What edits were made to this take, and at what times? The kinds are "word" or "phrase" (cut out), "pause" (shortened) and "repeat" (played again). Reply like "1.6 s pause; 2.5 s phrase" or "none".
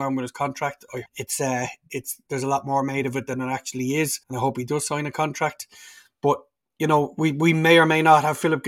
1.1 s word; 4.2 s pause